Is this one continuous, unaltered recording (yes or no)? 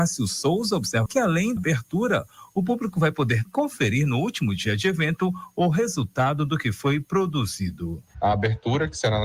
no